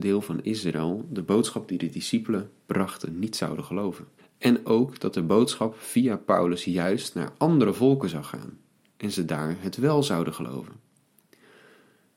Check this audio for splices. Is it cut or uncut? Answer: cut